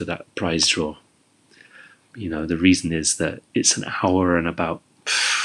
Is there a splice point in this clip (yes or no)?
no